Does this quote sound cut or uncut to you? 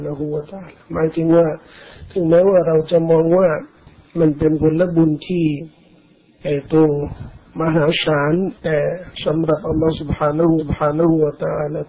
cut